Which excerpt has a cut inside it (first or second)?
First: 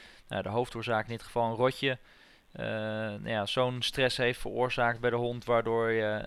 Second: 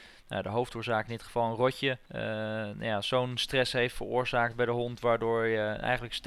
second